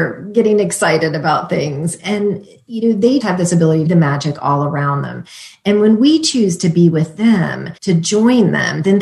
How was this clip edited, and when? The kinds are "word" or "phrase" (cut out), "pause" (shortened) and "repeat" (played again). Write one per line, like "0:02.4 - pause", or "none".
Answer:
0:03.2 - word
0:03.9 - phrase
0:07.8 - pause